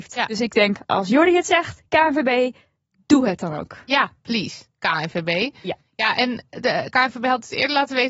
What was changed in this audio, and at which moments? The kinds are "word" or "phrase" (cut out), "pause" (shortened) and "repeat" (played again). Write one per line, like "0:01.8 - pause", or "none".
none